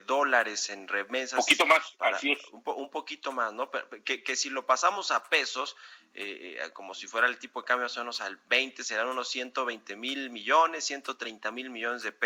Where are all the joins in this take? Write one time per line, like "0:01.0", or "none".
none